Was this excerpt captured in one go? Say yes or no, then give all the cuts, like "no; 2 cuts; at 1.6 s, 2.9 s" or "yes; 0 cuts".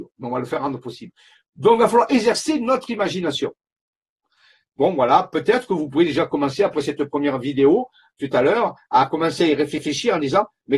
yes; 0 cuts